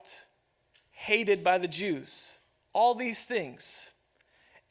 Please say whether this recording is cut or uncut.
cut